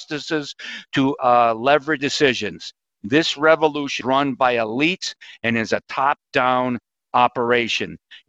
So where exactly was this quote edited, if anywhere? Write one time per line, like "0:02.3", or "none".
0:01.2
0:02.0
0:04.0

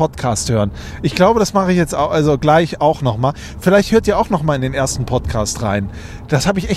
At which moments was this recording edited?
none

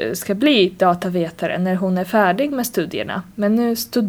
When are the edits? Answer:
none

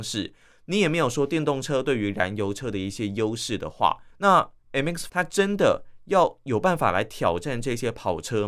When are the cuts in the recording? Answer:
0:04.1
0:05.1

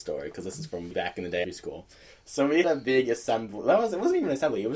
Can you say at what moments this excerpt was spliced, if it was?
0:00.9
0:01.4
0:02.6

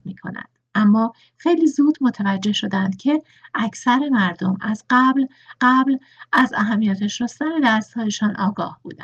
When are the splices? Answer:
0:05.6

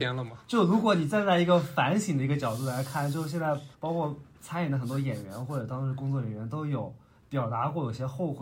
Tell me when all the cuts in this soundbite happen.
0:03.7

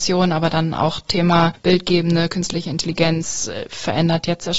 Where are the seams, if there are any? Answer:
none

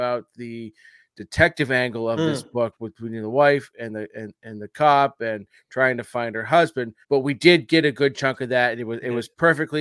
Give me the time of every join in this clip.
0:07.0

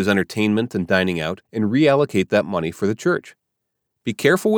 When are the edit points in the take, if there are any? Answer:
0:01.4

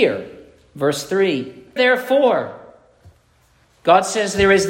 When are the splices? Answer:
0:01.8

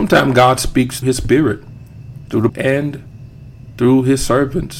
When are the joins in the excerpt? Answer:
0:01.0
0:02.5

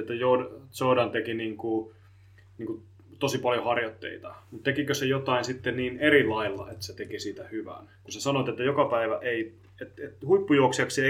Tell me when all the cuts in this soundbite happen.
none

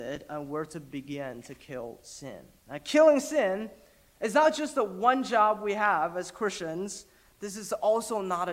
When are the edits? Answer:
none

